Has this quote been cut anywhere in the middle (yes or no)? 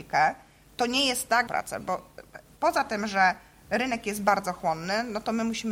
yes